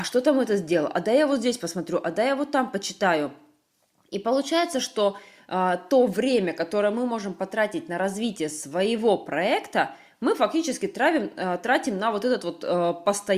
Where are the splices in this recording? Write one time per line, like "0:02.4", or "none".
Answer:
none